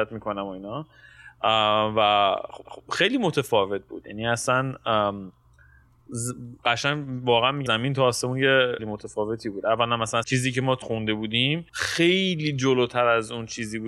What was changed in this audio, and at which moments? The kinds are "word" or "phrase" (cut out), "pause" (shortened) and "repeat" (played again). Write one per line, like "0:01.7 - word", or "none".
0:02.6 - repeat
0:06.6 - pause
0:07.7 - word
0:08.8 - phrase
0:10.2 - phrase
0:10.8 - word
0:11.7 - pause